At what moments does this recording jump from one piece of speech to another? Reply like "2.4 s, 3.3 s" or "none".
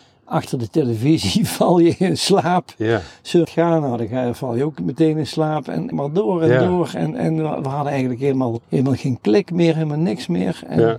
3.4 s, 5.9 s, 8.6 s